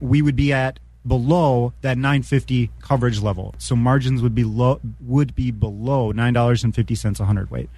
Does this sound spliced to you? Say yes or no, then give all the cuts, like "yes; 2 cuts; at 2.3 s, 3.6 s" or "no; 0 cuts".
no; 0 cuts